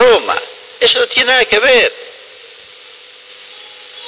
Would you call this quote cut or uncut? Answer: uncut